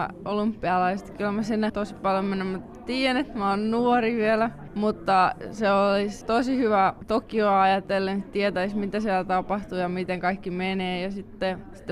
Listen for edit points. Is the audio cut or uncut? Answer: cut